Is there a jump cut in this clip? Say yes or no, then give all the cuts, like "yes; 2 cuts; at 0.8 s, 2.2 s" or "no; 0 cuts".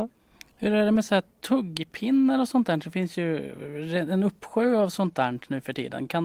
no; 0 cuts